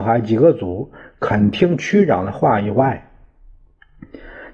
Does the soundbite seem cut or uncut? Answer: uncut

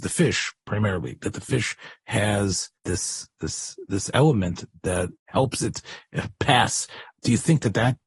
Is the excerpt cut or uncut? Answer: cut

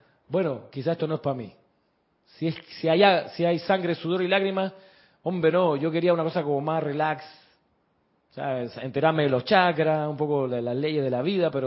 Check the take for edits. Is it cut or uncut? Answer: uncut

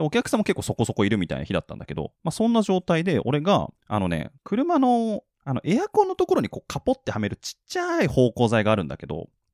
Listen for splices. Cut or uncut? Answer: cut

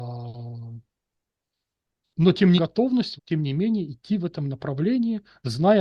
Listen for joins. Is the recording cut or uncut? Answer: cut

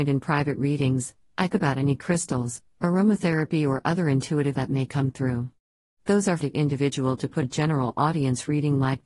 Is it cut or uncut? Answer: cut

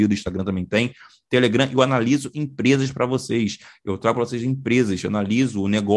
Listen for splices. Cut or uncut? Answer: uncut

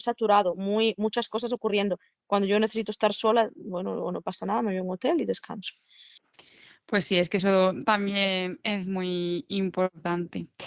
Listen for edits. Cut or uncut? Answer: uncut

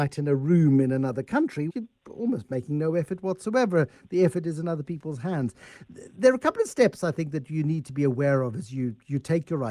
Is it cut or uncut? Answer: cut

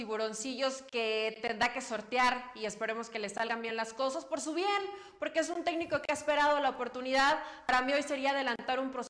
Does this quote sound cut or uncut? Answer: uncut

